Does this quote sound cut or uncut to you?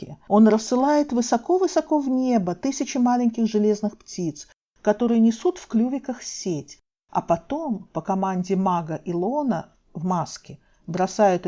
uncut